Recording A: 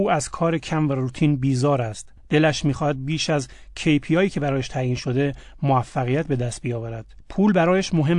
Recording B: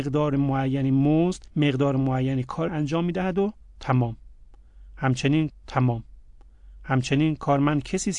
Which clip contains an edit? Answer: B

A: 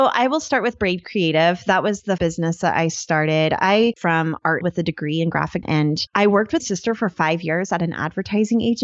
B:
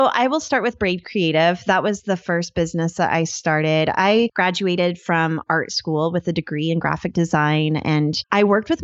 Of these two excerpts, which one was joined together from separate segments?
A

